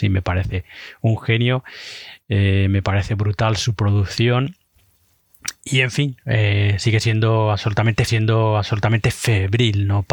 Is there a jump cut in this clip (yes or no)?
yes